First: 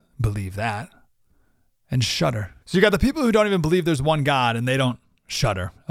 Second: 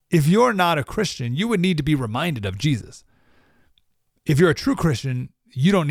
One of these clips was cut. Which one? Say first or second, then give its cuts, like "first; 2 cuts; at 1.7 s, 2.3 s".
first; 1 cut; at 2.6 s